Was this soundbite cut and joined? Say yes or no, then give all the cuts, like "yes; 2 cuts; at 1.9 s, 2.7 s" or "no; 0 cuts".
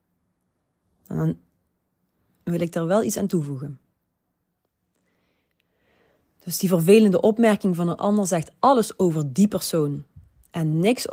no; 0 cuts